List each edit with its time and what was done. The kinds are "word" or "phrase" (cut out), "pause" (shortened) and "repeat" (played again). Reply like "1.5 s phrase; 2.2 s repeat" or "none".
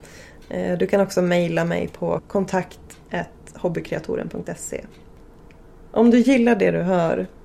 none